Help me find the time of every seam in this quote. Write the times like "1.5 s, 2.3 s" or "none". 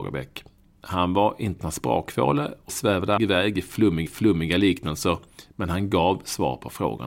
1.6 s, 2.7 s, 3.2 s, 4.1 s